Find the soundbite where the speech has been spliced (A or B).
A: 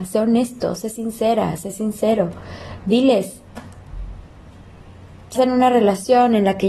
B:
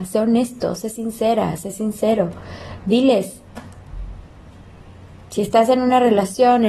A